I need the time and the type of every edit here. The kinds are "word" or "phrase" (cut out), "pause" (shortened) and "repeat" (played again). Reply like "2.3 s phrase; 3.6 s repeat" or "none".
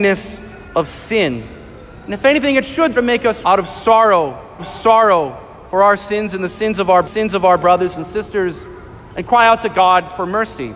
3.0 s word; 3.4 s word; 4.6 s repeat; 7.0 s repeat